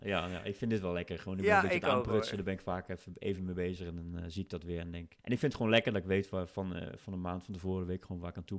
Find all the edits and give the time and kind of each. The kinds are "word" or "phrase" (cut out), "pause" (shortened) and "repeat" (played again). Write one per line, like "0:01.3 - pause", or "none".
0:05.2 - pause